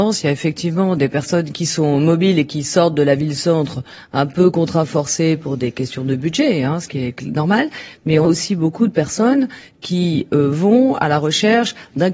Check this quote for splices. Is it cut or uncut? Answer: cut